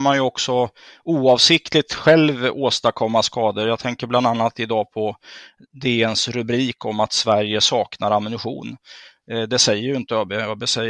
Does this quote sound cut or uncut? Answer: uncut